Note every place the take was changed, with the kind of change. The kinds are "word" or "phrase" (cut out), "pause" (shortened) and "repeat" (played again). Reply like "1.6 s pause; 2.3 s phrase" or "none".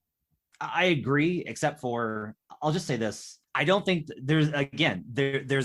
3.5 s pause